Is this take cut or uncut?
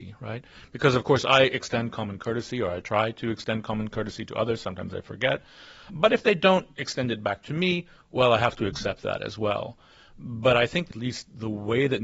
uncut